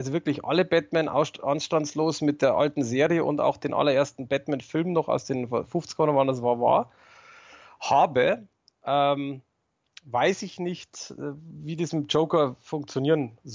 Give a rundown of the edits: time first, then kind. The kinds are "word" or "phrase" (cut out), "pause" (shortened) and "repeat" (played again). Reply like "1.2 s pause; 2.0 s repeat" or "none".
none

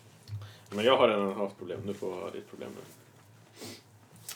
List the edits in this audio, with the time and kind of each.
1.6 s word

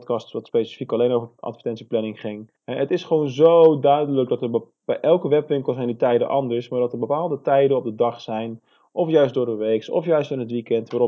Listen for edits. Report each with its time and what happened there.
2.6 s pause

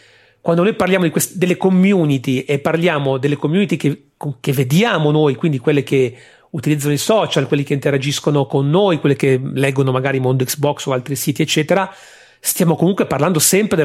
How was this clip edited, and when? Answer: none

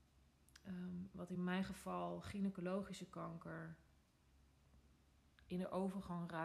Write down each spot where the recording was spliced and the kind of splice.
none

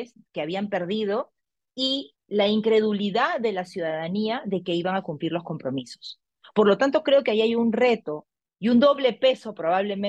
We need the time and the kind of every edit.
none

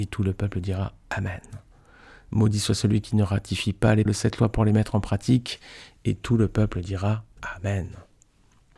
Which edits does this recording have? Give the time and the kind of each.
4.1 s word

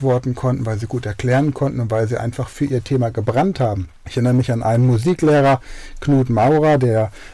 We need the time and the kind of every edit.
none

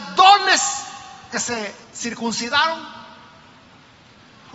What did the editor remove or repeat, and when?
1.3 s word; 1.8 s pause

